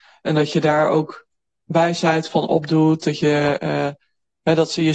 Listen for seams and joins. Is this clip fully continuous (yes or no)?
yes